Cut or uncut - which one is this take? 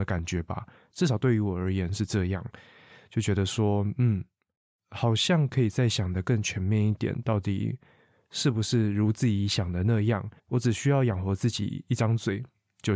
cut